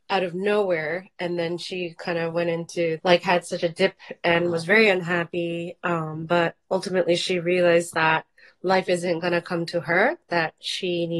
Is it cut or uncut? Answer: cut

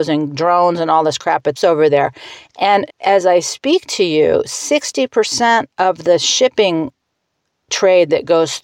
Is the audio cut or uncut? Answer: cut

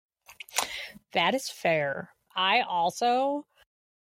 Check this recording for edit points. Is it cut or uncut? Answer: cut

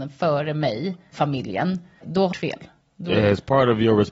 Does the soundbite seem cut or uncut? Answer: cut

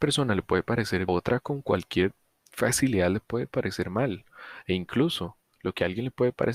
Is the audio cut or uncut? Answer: cut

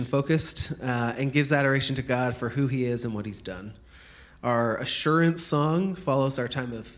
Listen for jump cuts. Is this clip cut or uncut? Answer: uncut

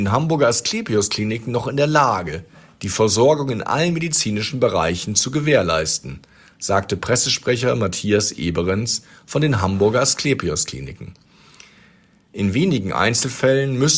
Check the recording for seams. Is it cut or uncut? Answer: uncut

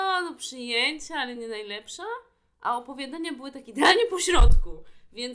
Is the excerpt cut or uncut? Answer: uncut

